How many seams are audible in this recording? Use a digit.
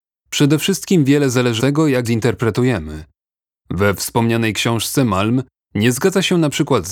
2